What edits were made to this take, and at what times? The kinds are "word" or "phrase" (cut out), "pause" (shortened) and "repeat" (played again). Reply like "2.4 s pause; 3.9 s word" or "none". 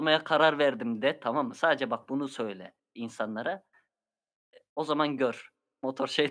none

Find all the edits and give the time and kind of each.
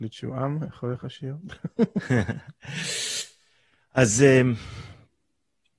none

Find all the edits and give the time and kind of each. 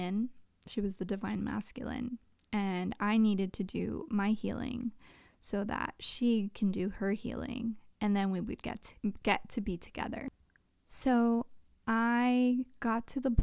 9.0 s pause

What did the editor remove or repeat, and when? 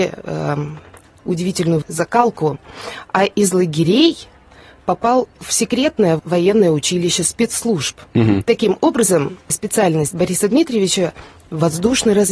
1.8 s word; 6.2 s word; 9.5 s word

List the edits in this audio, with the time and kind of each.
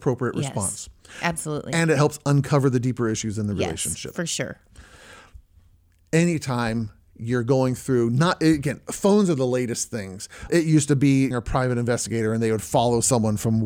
10.5 s word; 11.3 s word

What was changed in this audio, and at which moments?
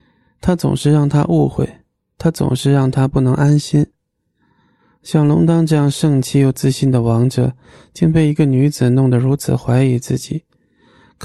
none

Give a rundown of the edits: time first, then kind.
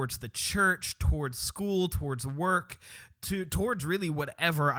none

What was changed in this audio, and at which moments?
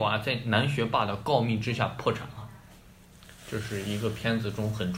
3.4 s pause

